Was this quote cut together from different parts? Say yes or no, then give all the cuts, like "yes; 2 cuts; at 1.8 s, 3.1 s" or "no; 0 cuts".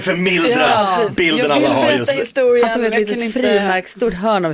no; 0 cuts